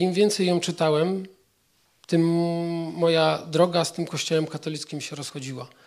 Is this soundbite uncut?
yes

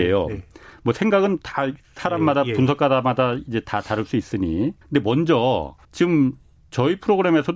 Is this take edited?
yes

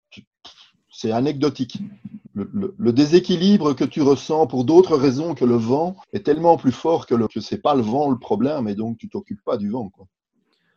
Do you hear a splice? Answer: yes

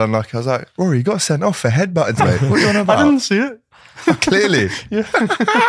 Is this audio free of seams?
no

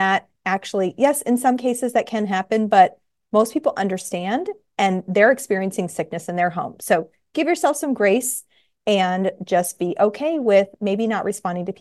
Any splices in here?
no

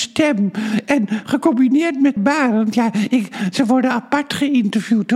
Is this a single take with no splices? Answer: no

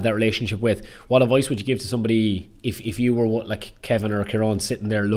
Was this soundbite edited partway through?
no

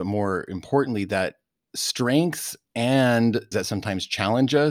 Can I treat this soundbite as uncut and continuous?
no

